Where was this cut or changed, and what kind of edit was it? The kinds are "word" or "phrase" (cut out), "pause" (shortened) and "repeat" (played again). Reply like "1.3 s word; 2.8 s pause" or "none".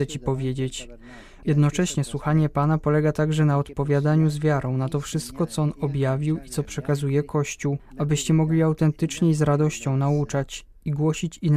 none